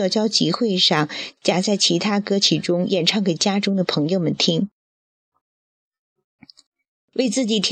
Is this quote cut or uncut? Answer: uncut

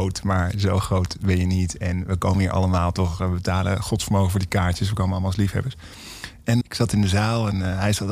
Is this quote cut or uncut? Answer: cut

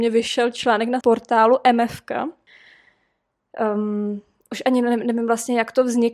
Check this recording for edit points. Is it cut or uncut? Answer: cut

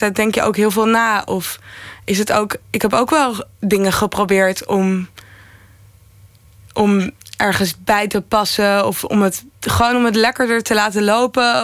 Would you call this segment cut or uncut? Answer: uncut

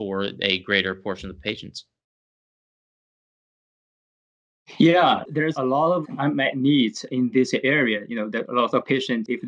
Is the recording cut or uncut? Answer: uncut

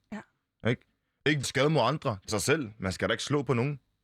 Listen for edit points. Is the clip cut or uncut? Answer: cut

